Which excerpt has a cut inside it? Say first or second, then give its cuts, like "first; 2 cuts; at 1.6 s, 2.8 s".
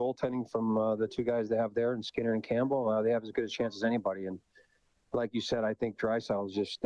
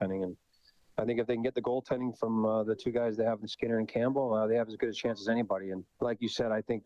second; 2 cuts; at 3.4 s, 5.9 s